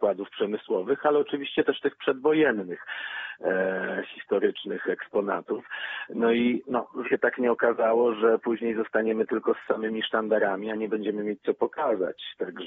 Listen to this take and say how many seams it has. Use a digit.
2